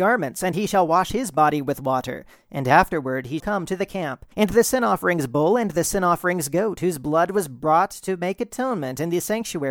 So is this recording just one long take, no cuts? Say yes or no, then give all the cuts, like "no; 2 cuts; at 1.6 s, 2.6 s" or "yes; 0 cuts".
no; 2 cuts; at 3.4 s, 4.3 s